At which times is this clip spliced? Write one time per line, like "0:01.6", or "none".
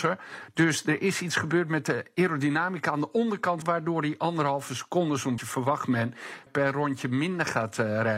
0:03.6
0:05.4
0:06.5